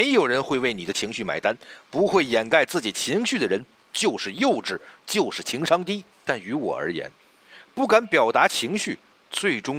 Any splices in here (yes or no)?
yes